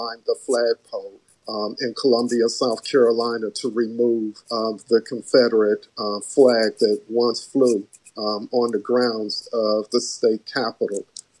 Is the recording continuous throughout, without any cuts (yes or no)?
no